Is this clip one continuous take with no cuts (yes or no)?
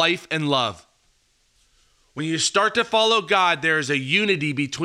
yes